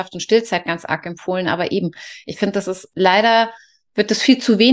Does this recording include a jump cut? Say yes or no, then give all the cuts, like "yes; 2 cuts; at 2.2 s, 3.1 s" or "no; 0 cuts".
no; 0 cuts